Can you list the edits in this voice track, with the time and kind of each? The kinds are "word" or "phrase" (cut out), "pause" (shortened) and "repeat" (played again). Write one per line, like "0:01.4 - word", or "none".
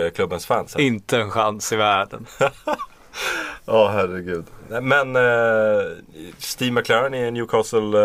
none